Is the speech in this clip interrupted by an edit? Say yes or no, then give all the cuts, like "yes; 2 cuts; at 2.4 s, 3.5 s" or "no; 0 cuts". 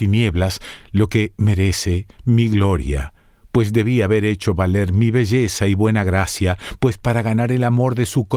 no; 0 cuts